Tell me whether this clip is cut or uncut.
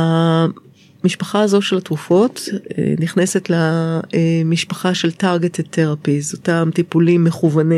uncut